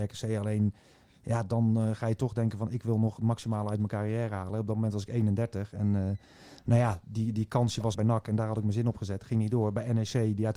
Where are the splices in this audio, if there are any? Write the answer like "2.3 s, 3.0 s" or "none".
7.9 s